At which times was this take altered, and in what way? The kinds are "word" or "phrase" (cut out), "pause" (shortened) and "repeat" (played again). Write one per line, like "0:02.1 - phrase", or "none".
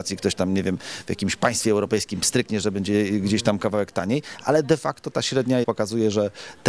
0:05.6 - word